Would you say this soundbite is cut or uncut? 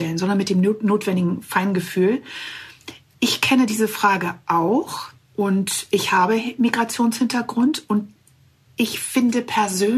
uncut